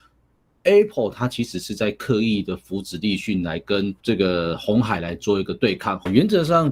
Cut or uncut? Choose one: cut